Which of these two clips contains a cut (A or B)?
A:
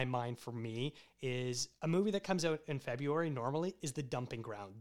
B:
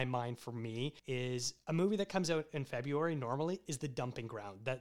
B